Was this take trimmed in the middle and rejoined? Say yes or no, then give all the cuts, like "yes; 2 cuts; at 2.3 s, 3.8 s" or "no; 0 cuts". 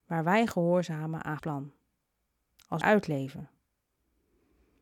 yes; 2 cuts; at 1.4 s, 2.8 s